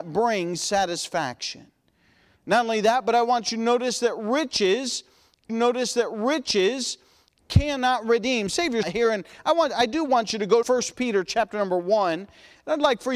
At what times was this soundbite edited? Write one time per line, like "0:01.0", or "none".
0:05.5
0:08.8
0:10.6

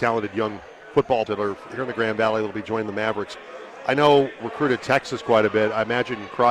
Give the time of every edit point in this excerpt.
0:01.3
0:04.4

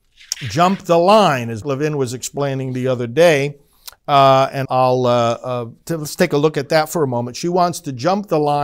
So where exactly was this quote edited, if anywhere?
0:01.6
0:04.6

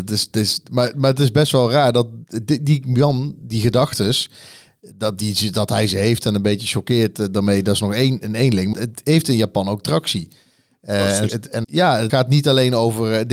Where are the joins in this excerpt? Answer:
0:08.7
0:11.3
0:11.6
0:12.1

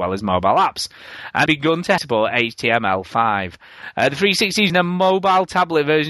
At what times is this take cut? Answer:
0:01.5
0:02.0
0:04.7

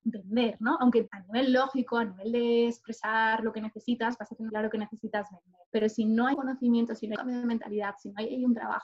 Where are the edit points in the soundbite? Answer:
0:01.1
0:04.5
0:05.7
0:06.3
0:07.2

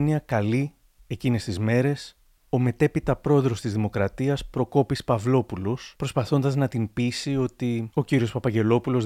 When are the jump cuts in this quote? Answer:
none

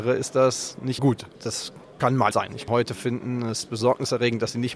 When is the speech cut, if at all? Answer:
0:01.0
0:01.3
0:02.3
0:02.7

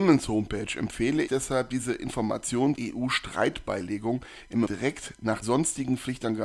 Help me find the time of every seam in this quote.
0:01.3
0:02.7
0:04.7
0:05.4

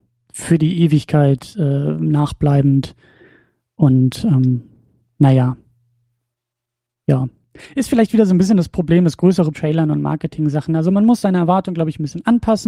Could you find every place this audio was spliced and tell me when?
0:09.5

